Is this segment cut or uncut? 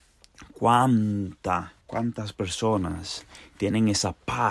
cut